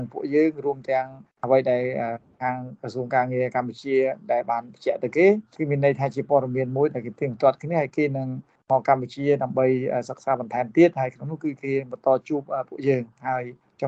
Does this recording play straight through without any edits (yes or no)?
yes